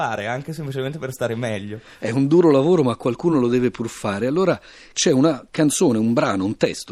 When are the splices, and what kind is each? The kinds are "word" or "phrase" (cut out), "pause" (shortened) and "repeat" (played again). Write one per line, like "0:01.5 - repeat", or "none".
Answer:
none